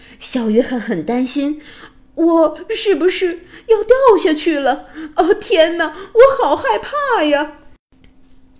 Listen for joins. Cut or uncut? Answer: uncut